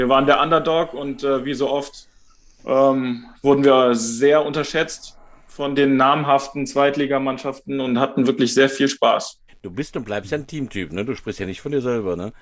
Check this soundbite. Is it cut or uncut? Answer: cut